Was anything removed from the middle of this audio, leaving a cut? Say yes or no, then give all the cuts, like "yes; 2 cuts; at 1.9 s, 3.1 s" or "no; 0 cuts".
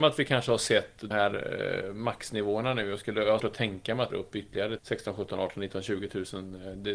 yes; 4 cuts; at 1.1 s, 3.4 s, 4.1 s, 4.8 s